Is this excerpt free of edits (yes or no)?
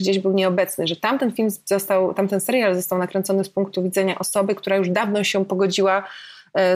yes